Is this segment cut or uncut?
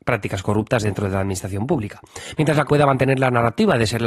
cut